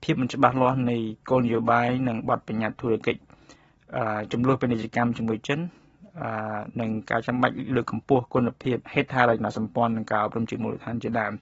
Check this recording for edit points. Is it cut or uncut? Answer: cut